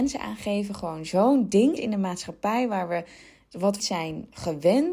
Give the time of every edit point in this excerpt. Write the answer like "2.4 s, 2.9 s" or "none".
1.8 s, 3.8 s